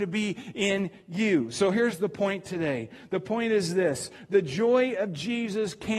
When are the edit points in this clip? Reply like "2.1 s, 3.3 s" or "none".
none